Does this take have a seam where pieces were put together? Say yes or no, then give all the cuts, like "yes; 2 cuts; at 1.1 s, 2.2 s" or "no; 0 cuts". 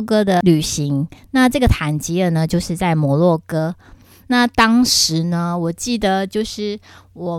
no; 0 cuts